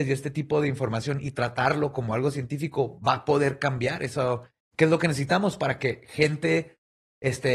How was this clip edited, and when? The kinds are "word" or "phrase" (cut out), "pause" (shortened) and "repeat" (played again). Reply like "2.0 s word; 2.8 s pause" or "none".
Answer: none